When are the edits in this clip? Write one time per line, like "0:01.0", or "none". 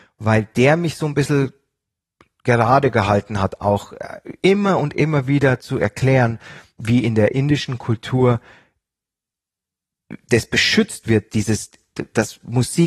none